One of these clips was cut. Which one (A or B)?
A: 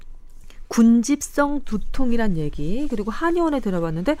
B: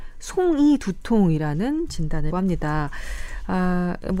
B